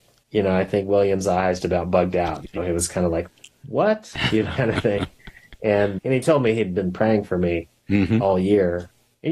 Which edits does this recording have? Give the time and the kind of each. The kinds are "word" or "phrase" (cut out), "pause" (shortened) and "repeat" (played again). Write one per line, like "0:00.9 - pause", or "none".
0:01.6 - word
0:02.6 - word
0:04.6 - word
0:06.0 - word